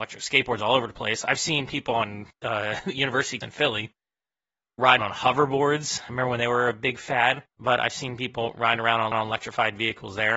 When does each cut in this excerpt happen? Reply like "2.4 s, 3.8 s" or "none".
2.3 s, 3.4 s, 5.0 s, 7.5 s, 9.1 s